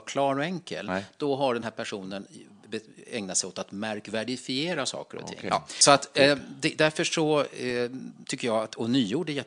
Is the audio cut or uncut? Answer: uncut